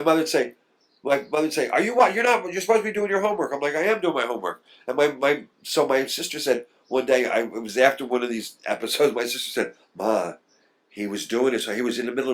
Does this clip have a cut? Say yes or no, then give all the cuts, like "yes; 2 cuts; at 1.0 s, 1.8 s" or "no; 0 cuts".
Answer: no; 0 cuts